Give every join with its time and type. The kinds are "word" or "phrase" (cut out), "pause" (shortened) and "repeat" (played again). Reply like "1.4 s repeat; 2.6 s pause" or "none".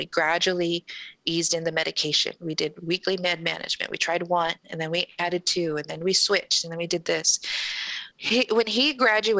8.1 s pause